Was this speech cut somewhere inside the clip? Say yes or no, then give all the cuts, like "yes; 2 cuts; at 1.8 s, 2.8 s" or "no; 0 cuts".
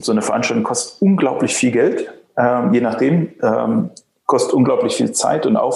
no; 0 cuts